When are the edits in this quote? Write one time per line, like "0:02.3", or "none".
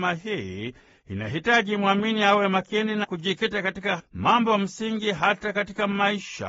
0:03.0
0:04.0